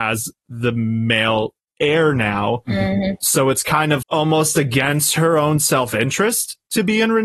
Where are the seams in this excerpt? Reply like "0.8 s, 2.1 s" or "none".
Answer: 4.0 s